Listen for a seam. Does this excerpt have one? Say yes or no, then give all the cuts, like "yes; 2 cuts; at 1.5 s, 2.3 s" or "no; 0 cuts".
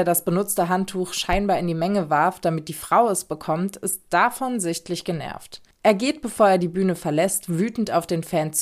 no; 0 cuts